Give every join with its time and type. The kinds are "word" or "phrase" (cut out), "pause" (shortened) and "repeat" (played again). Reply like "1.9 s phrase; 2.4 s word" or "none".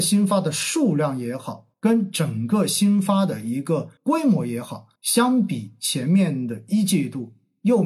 1.7 s pause; 4.0 s pause; 5.0 s pause